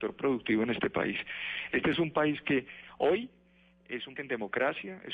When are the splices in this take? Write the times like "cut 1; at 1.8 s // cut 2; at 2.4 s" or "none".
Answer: cut 1; at 4.2 s